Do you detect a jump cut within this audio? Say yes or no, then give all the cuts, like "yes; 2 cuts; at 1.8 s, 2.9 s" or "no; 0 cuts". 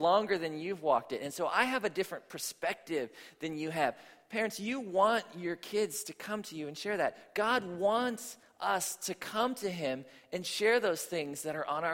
no; 0 cuts